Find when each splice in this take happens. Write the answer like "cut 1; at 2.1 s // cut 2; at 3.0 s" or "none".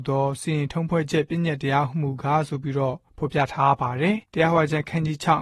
cut 1; at 4.2 s